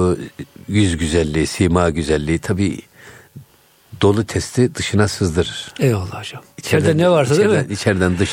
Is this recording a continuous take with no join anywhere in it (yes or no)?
no